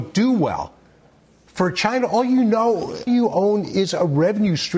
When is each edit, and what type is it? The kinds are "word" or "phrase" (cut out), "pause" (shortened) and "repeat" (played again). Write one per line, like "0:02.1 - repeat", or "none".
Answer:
0:03.1 - word